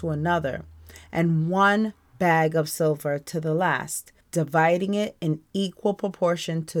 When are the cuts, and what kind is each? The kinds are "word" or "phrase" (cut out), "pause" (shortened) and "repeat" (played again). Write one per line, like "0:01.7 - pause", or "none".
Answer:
0:04.2 - pause